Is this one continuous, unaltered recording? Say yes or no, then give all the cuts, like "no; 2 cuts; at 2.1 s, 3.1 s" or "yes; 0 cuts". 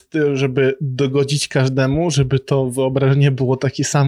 yes; 0 cuts